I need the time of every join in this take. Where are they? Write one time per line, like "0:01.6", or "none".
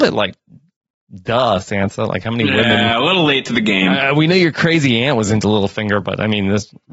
none